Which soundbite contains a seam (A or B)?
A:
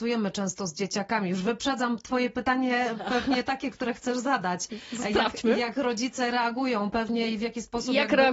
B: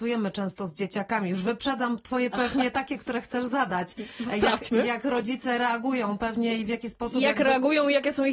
B